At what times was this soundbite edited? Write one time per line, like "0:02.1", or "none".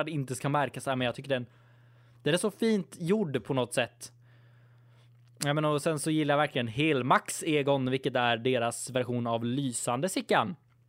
none